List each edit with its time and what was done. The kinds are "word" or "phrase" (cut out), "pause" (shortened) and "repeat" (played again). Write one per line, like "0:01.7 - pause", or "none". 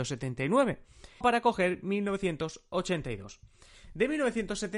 0:01.2 - word